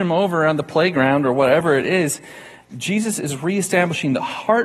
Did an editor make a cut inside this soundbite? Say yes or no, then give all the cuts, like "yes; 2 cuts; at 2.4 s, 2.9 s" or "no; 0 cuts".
no; 0 cuts